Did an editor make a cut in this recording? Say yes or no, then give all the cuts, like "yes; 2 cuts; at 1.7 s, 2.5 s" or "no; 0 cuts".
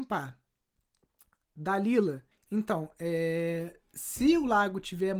yes; 1 cut; at 2.3 s